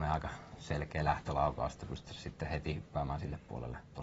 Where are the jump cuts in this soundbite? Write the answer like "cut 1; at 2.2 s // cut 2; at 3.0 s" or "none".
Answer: none